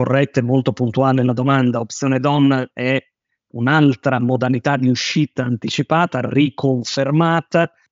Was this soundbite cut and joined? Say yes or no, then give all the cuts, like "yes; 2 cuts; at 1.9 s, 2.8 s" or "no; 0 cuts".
no; 0 cuts